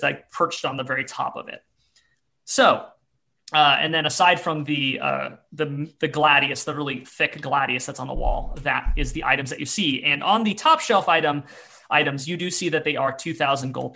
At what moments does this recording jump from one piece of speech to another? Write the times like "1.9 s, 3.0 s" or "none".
none